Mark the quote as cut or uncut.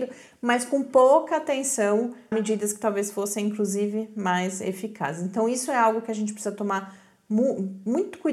cut